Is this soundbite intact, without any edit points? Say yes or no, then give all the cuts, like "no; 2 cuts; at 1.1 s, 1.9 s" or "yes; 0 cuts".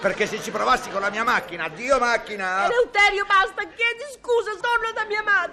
no; 1 cut; at 4.6 s